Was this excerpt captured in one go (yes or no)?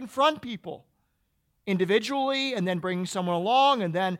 yes